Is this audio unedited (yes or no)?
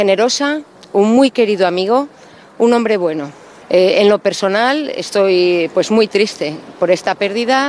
yes